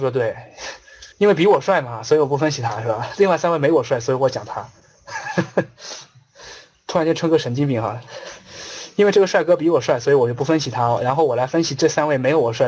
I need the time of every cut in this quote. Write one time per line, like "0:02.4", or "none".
0:01.1